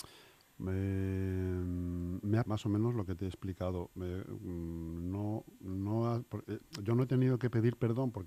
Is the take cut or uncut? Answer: cut